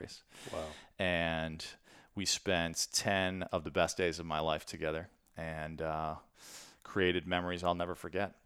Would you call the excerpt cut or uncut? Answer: uncut